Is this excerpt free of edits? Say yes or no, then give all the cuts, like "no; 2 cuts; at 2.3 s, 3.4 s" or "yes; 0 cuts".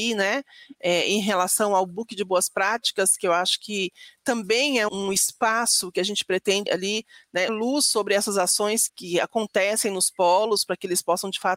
no; 4 cuts; at 4.9 s, 6.7 s, 7.5 s, 8.9 s